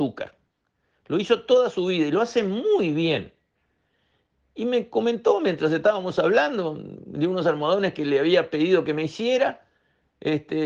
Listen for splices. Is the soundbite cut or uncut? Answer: uncut